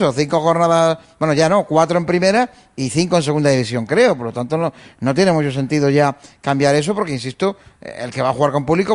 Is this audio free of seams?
yes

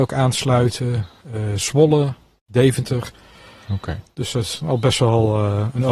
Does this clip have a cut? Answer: no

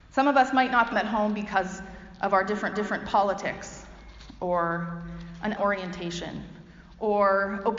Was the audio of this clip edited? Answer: yes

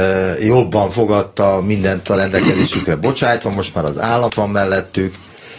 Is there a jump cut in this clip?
yes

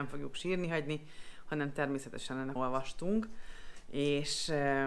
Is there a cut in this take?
yes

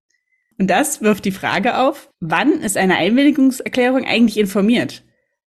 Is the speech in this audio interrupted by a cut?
yes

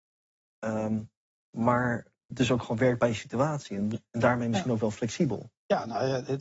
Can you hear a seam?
no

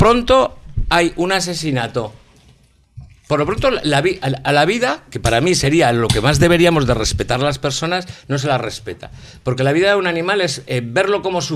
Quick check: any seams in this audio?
no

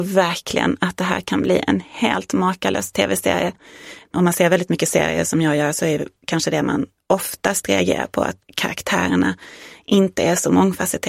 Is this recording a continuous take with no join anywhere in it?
yes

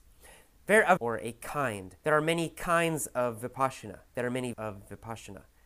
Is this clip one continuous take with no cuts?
no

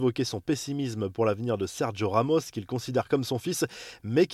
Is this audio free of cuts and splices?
yes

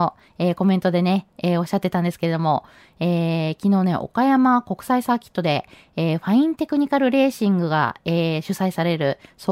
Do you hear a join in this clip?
no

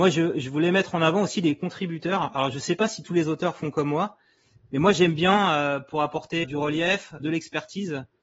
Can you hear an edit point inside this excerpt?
yes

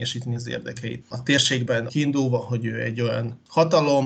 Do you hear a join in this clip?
yes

